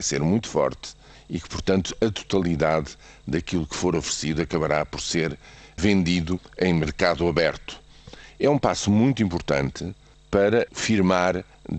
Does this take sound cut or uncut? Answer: uncut